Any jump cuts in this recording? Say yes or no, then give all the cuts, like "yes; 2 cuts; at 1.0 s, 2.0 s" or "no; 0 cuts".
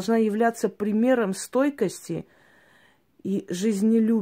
no; 0 cuts